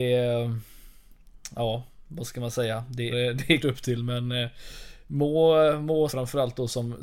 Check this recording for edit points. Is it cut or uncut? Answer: cut